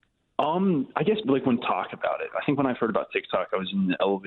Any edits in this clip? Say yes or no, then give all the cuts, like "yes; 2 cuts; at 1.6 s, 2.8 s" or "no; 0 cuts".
yes; 3 cuts; at 1.2 s, 1.6 s, 2.8 s